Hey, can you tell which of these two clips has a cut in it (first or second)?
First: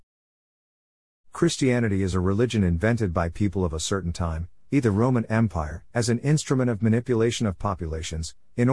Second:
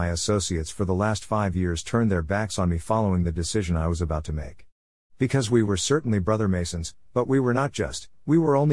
first